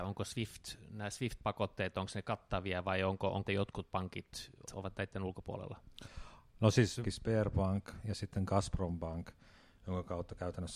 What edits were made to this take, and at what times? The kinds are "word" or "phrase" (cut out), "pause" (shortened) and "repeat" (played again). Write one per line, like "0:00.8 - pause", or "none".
0:03.5 - phrase
0:04.7 - word
0:07.0 - phrase